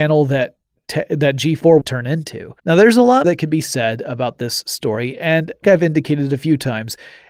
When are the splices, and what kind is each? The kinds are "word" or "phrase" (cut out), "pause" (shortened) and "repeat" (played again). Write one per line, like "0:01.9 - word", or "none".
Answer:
0:01.8 - phrase
0:02.6 - pause
0:03.2 - word
0:05.6 - word